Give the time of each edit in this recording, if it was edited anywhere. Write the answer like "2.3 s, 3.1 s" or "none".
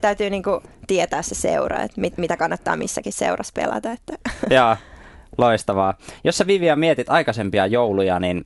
none